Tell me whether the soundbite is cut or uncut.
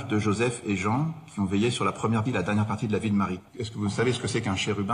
cut